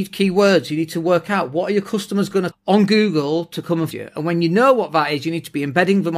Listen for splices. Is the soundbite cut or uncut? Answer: cut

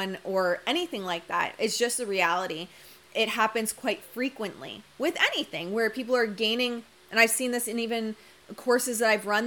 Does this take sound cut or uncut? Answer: uncut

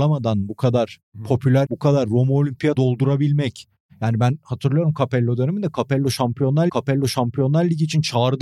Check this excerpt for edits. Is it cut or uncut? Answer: cut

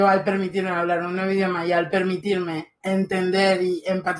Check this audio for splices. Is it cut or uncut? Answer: cut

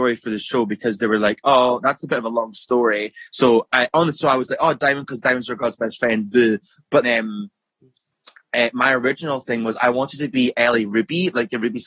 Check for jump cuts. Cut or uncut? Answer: cut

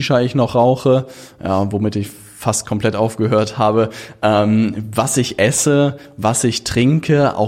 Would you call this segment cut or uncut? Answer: uncut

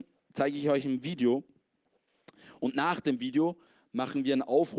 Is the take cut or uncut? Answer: uncut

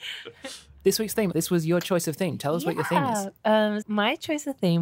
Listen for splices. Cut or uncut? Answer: cut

